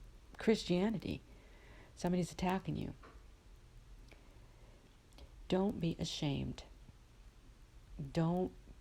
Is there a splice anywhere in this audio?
no; 0 cuts

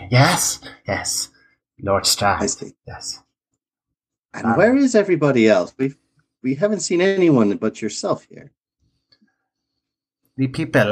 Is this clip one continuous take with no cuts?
yes; 0 cuts

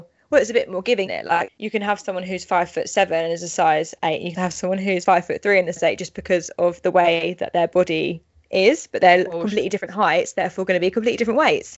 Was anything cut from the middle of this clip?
yes; 5 cuts; at 1.1 s, 1.5 s, 4.3 s, 5.0 s, 5.8 s

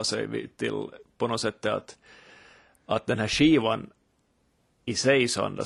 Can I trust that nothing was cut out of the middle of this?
yes; 0 cuts

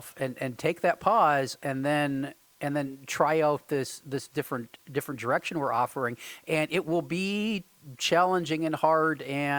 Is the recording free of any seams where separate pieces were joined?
yes; 0 cuts

